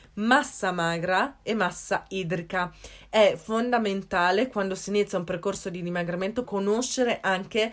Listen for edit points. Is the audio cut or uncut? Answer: cut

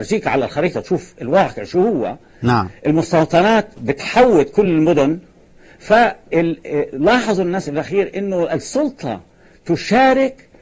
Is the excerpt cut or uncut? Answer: uncut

